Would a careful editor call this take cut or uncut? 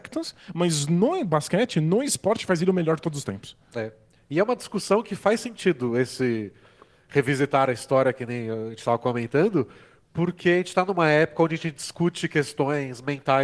uncut